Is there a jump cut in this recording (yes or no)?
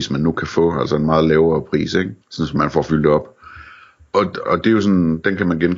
yes